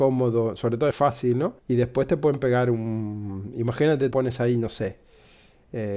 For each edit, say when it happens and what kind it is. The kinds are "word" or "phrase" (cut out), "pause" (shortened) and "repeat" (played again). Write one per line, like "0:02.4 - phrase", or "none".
0:00.9 - phrase
0:01.6 - pause
0:04.1 - word

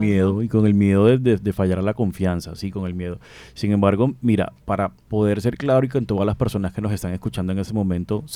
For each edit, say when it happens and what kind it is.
none

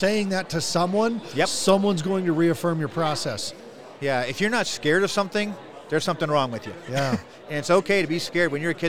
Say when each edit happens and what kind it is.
none

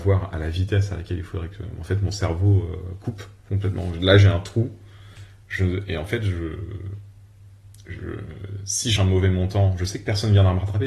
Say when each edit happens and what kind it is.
0:09.0 - word

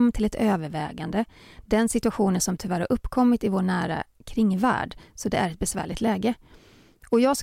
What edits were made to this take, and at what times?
none

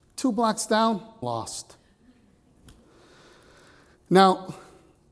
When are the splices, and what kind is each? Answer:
0:01.2 - word

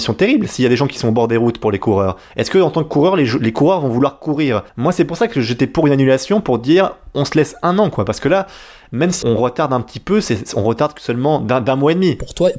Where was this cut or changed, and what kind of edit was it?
0:04.7 - pause
0:09.2 - word

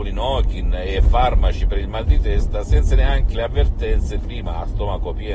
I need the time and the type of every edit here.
0:03.3 - word
0:04.2 - word

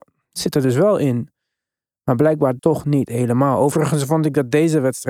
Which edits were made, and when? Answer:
0:02.6 - word

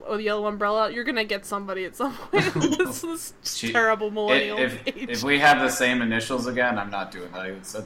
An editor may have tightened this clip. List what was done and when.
none

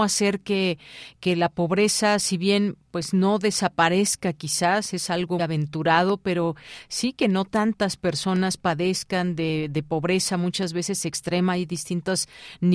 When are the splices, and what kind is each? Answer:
0:05.4 - word

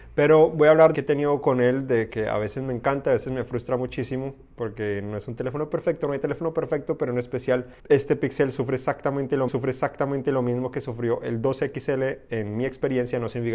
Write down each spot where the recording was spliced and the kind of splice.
0:00.9 - phrase
0:07.8 - pause
0:09.5 - repeat

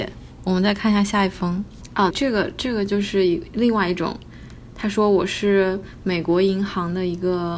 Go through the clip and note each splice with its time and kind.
0:02.1 - word

